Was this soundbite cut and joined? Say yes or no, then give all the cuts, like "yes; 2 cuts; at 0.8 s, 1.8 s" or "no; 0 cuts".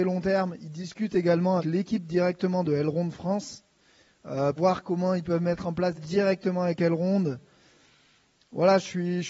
yes; 3 cuts; at 1.6 s, 4.6 s, 6.0 s